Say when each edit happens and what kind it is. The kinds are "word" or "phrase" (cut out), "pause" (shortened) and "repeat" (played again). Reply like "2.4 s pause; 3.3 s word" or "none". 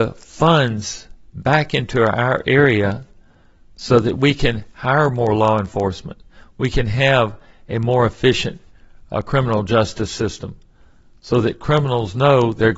none